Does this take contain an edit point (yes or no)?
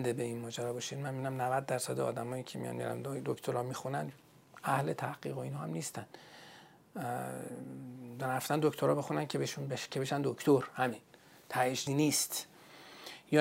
yes